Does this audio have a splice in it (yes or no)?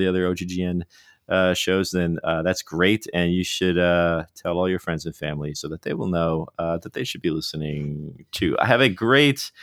no